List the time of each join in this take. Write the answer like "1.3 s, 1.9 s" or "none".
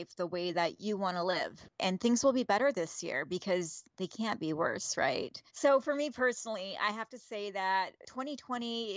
3.9 s, 5.5 s